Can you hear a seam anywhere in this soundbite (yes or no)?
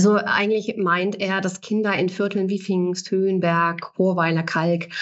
no